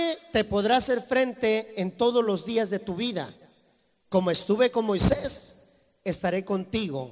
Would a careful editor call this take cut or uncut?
uncut